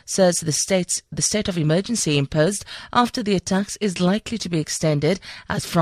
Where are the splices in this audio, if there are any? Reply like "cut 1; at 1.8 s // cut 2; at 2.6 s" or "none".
cut 1; at 1.1 s